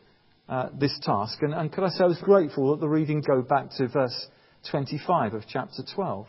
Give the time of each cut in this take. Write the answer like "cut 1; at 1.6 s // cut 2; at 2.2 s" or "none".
cut 1; at 2.2 s // cut 2; at 3.2 s